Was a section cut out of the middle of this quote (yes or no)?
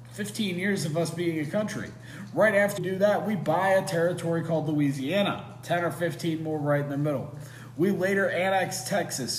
yes